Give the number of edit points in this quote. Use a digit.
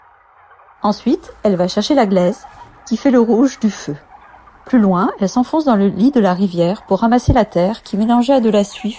0